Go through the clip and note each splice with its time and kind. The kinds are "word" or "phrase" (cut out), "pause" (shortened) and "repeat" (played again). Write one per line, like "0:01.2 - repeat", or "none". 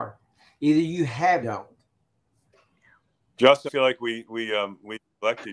0:01.4 - phrase
0:03.7 - word